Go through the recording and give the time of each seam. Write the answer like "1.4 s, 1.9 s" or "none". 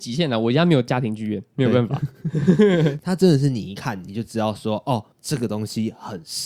5.1 s